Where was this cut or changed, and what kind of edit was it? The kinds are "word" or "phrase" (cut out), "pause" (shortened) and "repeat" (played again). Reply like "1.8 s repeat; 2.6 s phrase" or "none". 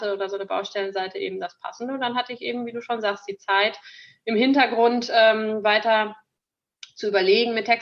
none